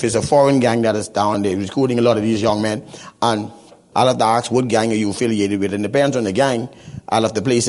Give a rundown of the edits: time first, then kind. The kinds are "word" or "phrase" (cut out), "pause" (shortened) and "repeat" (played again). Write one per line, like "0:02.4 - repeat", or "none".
0:01.3 - phrase
0:03.9 - word